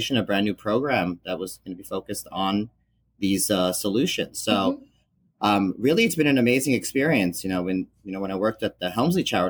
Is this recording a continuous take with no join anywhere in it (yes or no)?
yes